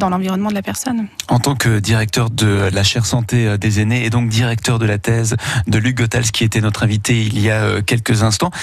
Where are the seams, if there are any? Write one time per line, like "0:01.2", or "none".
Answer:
none